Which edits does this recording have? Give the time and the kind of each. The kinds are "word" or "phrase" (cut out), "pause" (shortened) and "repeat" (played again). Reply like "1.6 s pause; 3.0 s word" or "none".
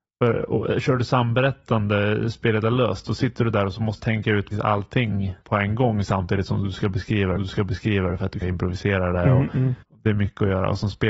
4.0 s word; 4.5 s word; 5.4 s pause; 7.4 s repeat; 8.4 s word; 9.8 s pause